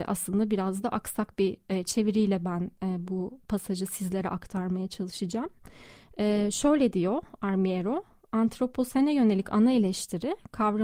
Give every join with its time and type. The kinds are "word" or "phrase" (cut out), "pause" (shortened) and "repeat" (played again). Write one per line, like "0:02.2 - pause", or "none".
none